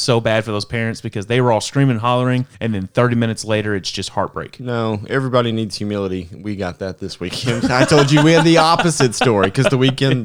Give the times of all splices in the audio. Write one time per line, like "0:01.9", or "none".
0:02.5